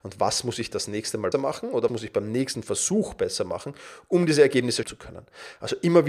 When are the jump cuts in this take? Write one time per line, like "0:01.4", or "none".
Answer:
0:01.3
0:01.9
0:04.8